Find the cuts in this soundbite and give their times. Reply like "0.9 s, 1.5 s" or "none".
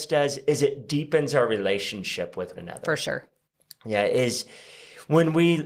2.6 s